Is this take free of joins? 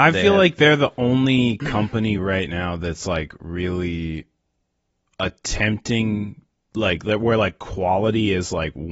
yes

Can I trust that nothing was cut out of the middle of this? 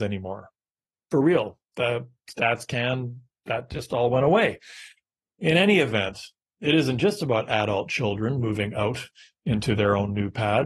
yes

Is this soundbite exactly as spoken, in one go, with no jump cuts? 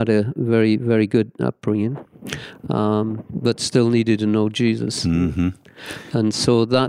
yes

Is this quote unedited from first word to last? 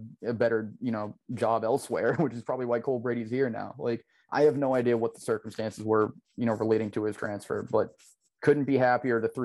yes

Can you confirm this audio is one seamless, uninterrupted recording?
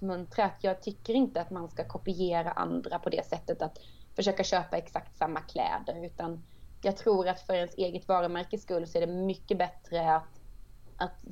yes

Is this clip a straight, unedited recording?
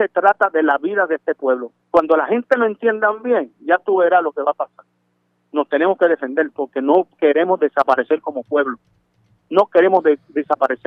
no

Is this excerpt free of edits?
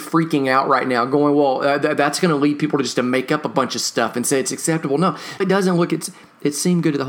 no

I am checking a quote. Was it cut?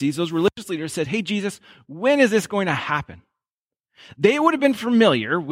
no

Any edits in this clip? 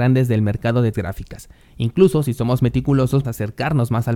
yes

